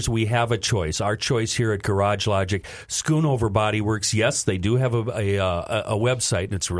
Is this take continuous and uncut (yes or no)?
yes